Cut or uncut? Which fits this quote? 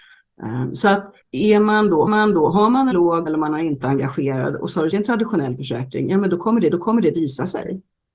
cut